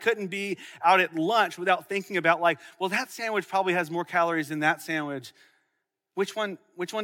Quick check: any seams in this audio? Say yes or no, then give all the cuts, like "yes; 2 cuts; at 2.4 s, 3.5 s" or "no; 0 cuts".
no; 0 cuts